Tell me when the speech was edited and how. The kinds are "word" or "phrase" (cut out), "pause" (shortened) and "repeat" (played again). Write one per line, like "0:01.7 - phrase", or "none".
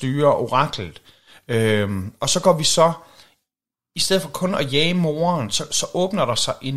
none